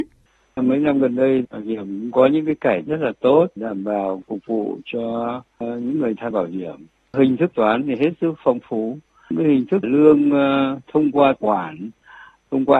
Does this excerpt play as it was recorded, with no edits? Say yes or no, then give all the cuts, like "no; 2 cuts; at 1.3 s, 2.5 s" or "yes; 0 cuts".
no; 7 cuts; at 1.4 s, 2.9 s, 3.6 s, 6.3 s, 7.5 s, 9.8 s, 11.4 s